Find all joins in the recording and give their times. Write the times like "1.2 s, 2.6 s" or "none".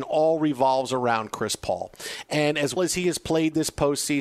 2.8 s

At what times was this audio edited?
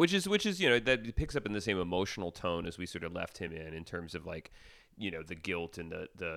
none

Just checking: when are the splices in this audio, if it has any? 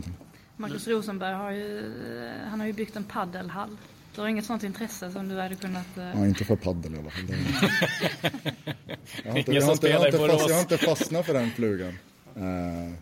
none

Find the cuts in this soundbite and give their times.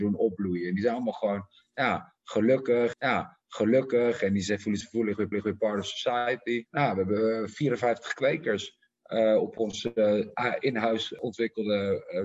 2.9 s, 4.8 s, 5.3 s, 6.7 s

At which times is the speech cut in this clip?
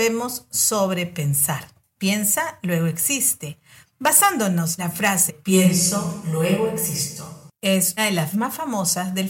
4.8 s, 5.3 s, 8.0 s, 8.3 s

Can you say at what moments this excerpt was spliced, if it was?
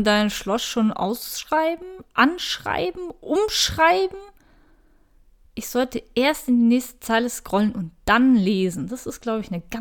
none

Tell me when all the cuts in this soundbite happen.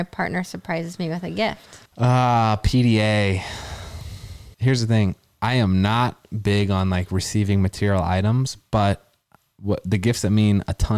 1.9 s, 4.5 s

